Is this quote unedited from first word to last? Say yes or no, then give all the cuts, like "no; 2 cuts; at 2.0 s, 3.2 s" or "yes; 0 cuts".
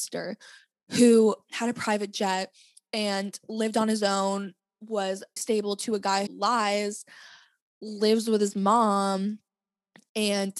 no; 2 cuts; at 5.4 s, 6.3 s